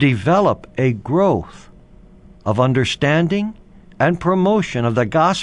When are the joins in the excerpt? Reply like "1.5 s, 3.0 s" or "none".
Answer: none